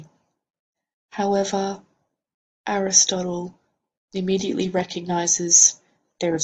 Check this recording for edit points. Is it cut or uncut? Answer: uncut